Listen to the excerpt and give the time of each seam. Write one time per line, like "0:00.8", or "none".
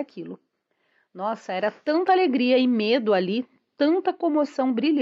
none